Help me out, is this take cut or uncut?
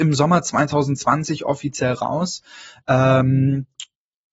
uncut